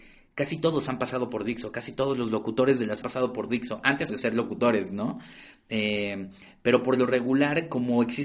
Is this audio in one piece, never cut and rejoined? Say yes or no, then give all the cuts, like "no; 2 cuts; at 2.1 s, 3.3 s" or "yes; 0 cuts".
no; 2 cuts; at 3.0 s, 4.1 s